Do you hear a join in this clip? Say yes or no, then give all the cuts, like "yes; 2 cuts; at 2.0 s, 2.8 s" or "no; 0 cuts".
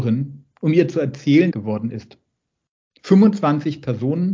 yes; 1 cut; at 1.5 s